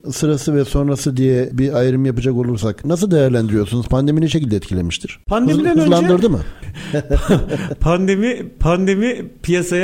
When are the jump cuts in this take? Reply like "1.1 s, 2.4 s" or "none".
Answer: 8.6 s